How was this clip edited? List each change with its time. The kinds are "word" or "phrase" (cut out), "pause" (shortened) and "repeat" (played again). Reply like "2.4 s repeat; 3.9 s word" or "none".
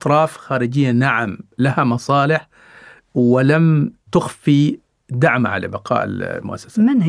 none